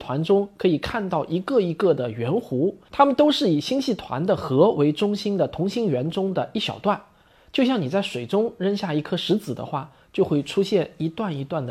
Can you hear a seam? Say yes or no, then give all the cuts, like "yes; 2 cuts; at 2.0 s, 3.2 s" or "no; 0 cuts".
yes; 1 cut; at 2.8 s